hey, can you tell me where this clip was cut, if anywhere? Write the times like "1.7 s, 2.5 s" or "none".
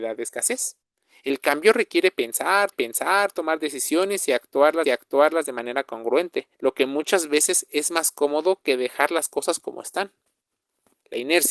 2.7 s, 4.8 s, 6.5 s